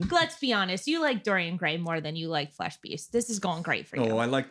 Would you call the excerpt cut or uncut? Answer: uncut